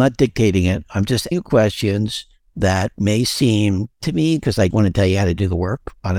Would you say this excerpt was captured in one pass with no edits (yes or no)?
no